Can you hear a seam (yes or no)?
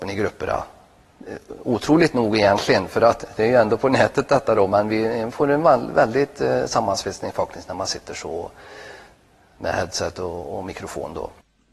no